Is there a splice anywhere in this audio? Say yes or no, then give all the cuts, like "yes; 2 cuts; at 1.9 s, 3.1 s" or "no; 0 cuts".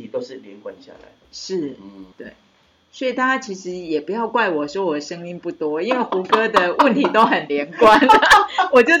yes; 2 cuts; at 1.2 s, 2.1 s